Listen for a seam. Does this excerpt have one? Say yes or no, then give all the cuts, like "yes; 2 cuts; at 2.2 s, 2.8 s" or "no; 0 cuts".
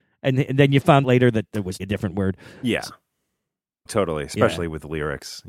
yes; 3 cuts; at 1.0 s, 1.8 s, 3.9 s